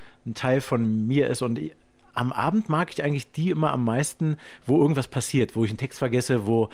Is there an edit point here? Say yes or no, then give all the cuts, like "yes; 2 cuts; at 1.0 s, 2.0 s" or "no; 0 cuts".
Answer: no; 0 cuts